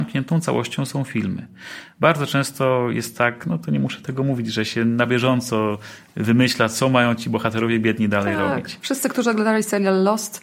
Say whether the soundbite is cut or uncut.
uncut